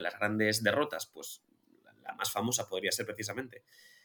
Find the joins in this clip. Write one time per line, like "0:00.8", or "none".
none